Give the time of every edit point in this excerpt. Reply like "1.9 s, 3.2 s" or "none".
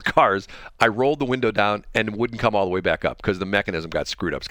none

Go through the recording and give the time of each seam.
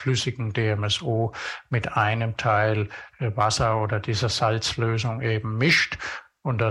none

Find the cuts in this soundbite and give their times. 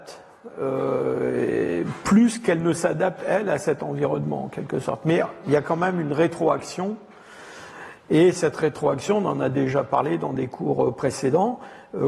none

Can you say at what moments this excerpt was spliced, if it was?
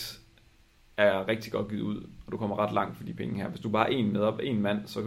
none

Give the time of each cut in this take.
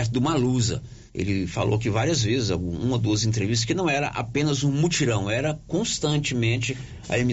1.1 s

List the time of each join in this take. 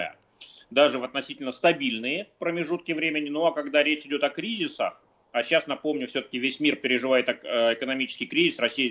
none

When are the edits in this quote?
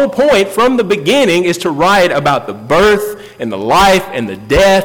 none

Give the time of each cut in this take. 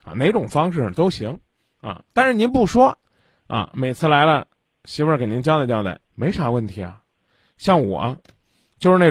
6.1 s

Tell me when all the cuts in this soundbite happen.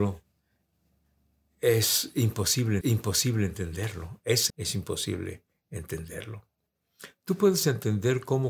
2.8 s, 4.5 s

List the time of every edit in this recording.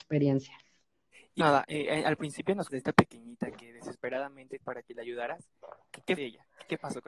1.4 s, 2.7 s, 4.6 s, 6.2 s

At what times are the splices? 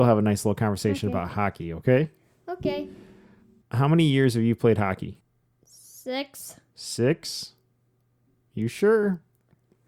none

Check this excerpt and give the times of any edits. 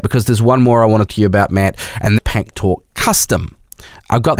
1.1 s, 2.2 s

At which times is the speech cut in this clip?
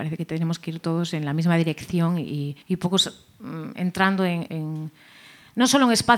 2.6 s, 4.5 s

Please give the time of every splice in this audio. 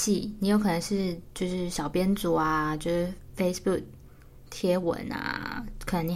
none

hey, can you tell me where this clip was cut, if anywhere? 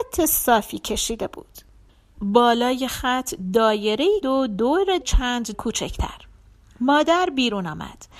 2.1 s, 4.2 s, 5.0 s, 5.5 s

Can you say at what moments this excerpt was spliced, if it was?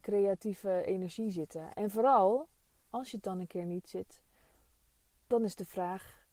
none

